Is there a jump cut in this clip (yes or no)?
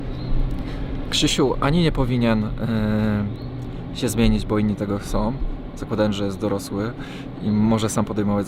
no